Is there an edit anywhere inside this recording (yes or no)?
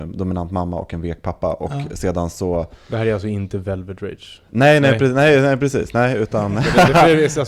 no